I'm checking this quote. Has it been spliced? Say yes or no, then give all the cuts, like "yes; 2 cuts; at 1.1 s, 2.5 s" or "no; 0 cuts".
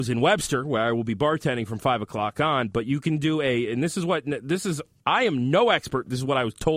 no; 0 cuts